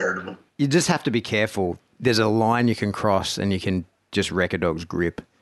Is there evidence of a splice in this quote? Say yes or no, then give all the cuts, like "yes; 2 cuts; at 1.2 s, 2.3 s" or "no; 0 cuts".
no; 0 cuts